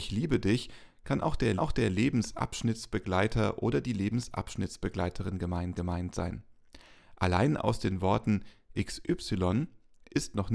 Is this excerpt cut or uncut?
cut